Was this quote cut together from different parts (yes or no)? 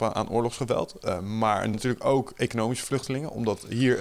yes